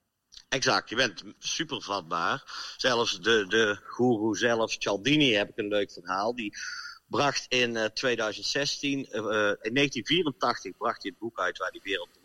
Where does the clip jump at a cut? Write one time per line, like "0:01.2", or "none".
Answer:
none

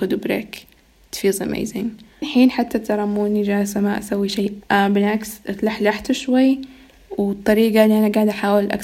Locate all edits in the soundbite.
0:02.1
0:04.6

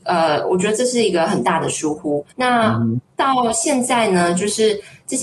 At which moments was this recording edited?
0:02.3

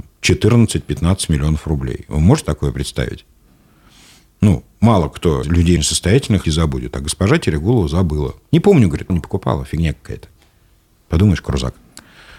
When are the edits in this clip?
0:02.4
0:05.4
0:05.8
0:06.4
0:08.4
0:09.1

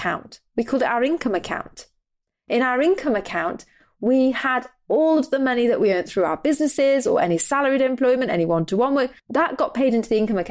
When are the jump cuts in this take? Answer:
0:09.2

